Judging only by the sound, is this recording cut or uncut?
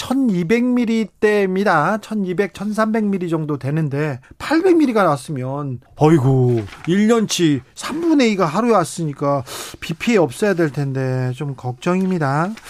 cut